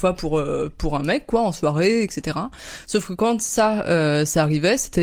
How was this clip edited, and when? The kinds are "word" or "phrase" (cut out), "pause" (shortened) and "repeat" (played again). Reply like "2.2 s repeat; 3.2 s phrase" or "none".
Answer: none